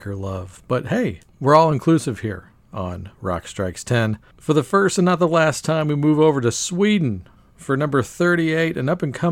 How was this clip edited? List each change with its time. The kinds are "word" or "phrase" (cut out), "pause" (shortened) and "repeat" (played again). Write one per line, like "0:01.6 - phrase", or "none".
none